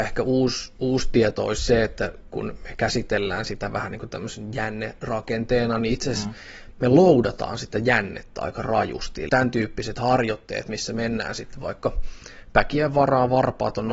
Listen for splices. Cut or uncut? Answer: cut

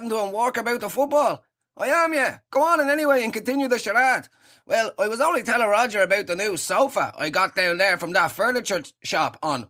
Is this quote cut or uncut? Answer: uncut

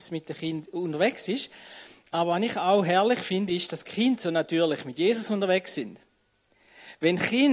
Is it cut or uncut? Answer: uncut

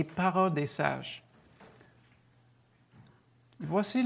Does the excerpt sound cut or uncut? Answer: uncut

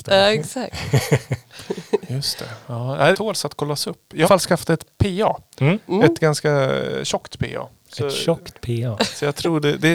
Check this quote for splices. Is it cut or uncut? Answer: cut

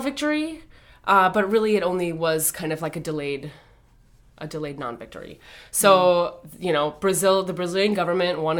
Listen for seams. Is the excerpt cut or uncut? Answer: uncut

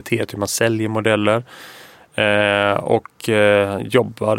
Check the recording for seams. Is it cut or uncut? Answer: uncut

